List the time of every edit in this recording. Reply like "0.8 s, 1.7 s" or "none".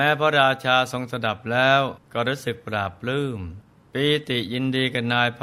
2.0 s, 3.7 s